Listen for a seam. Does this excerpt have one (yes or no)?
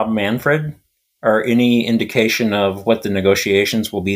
no